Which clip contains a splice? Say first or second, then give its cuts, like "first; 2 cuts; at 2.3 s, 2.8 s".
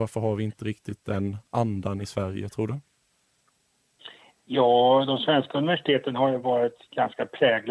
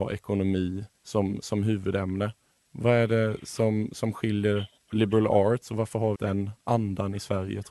second; 3 cuts; at 0.9 s, 2.5 s, 6.2 s